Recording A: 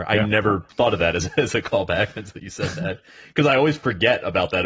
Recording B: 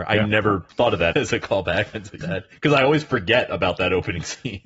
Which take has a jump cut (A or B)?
B